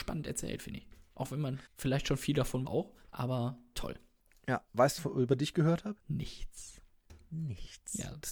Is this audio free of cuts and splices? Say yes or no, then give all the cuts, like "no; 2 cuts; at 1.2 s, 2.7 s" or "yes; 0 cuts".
no; 5 cuts; at 1.7 s, 2.7 s, 4.2 s, 5.0 s, 6.0 s